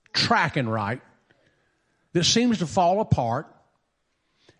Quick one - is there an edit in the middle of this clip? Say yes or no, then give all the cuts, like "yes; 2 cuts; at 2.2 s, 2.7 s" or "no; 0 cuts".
no; 0 cuts